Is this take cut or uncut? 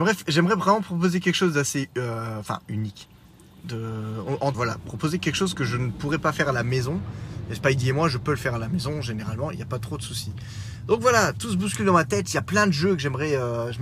cut